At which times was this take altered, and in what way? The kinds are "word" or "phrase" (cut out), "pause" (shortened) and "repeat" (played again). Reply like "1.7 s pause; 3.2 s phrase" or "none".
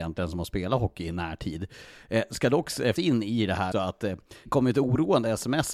3.0 s word; 3.7 s word; 4.5 s word